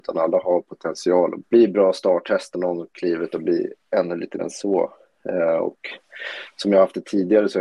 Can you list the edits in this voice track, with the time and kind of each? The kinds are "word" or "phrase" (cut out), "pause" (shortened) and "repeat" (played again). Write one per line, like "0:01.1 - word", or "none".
0:01.4 - word
0:02.5 - phrase
0:03.9 - word
0:04.4 - word